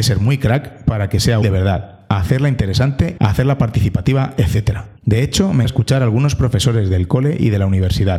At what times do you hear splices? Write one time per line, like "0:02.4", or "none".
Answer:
0:01.4
0:03.2
0:05.0
0:05.6